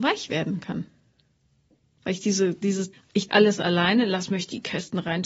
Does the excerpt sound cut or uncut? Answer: cut